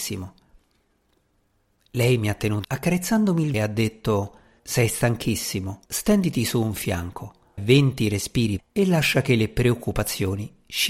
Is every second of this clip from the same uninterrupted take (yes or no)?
no